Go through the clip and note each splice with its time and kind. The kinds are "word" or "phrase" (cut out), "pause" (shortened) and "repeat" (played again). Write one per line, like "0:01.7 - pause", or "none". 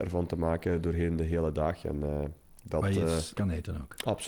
0:03.3 - word